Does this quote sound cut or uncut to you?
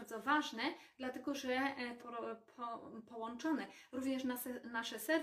cut